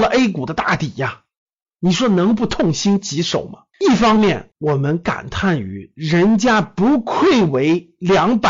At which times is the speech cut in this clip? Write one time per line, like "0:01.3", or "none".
0:03.7
0:04.5